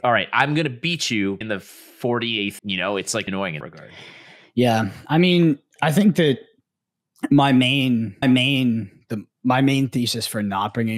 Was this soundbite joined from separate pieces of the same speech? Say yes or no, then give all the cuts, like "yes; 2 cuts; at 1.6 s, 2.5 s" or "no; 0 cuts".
yes; 6 cuts; at 1.4 s, 2.6 s, 3.3 s, 3.6 s, 5.8 s, 8.2 s